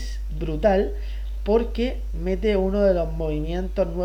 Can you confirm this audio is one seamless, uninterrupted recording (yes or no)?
no